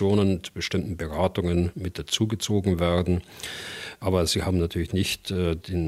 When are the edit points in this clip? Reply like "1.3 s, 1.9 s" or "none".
none

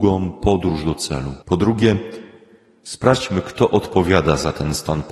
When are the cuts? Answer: 1.4 s

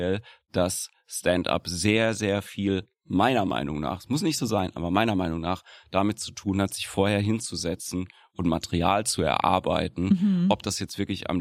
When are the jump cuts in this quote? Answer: none

